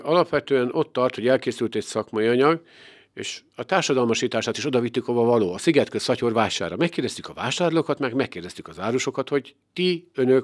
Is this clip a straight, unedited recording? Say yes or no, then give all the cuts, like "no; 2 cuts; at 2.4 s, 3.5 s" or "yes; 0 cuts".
yes; 0 cuts